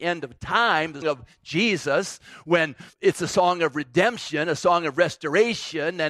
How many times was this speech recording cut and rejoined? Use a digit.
2